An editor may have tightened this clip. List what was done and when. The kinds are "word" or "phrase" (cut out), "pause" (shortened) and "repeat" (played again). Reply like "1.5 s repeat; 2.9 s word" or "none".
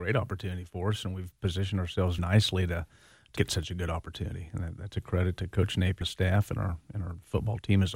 2.2 s word; 3.4 s word; 6.0 s word